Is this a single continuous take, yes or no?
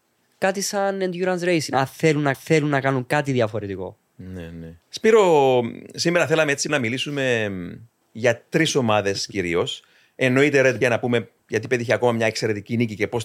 no